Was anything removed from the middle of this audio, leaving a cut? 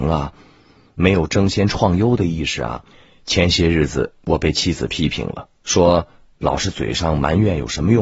yes; 2 cuts; at 2.9 s, 5.5 s

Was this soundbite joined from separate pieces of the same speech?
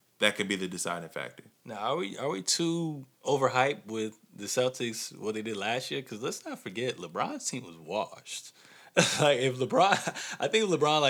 yes; 2 cuts; at 1.5 s, 3.1 s

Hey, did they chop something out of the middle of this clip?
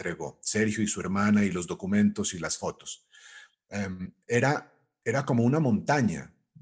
no; 0 cuts

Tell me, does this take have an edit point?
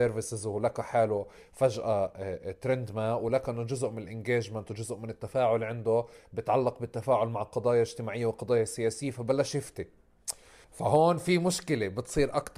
yes; 1 cut; at 10.6 s

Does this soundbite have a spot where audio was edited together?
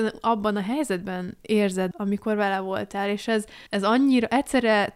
yes; 2 cuts; at 1.9 s, 3.7 s

